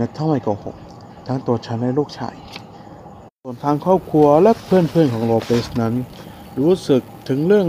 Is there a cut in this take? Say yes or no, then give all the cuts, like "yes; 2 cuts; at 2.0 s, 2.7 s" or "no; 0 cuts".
yes; 1 cut; at 3.4 s